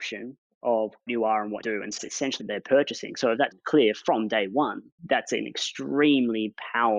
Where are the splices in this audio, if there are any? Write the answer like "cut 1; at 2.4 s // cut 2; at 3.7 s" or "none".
cut 1; at 1.1 s // cut 2; at 1.6 s // cut 3; at 2.0 s // cut 4; at 2.4 s // cut 5; at 3.5 s // cut 6; at 5.0 s